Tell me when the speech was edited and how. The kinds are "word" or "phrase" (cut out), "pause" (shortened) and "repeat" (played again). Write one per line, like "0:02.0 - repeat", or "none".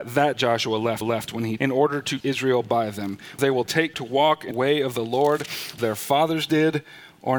0:01.0 - repeat
0:01.6 - word
0:02.2 - word
0:03.4 - word
0:03.9 - word
0:04.5 - word
0:05.8 - word